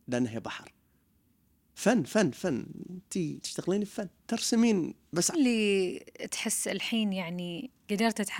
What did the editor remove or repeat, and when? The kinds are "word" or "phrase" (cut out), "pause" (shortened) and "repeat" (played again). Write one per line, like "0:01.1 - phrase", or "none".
0:03.4 - word
0:04.2 - pause
0:05.3 - phrase